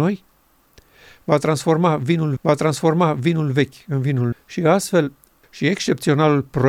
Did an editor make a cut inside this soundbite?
yes; 3 cuts; at 2.4 s, 4.3 s, 5.4 s

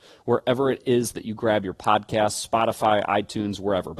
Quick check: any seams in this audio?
no; 0 cuts

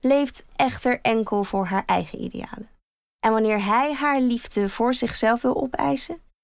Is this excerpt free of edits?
yes; 0 cuts

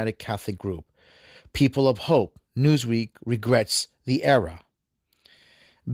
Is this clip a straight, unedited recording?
yes; 0 cuts

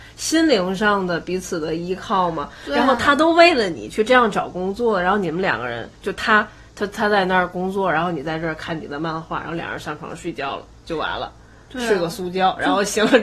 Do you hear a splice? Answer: no; 0 cuts

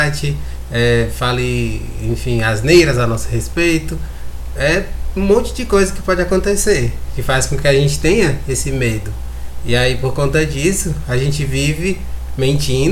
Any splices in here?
no; 0 cuts

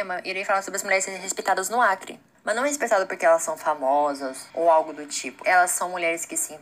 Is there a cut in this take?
yes; 3 cuts; at 2.3 s, 4.5 s, 5.4 s

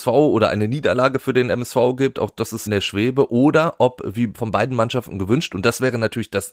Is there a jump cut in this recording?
yes; 1 cut; at 2.7 s

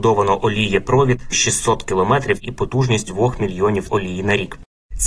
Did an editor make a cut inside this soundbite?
yes; 3 cuts; at 1.3 s, 3.1 s, 3.9 s

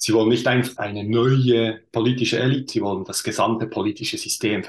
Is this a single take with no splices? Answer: no; 1 cut; at 2.7 s

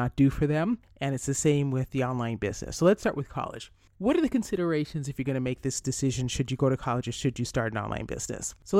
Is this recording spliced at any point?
no; 0 cuts

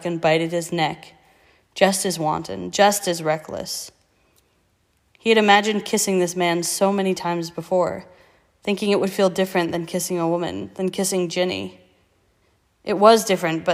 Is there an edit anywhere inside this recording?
no; 0 cuts

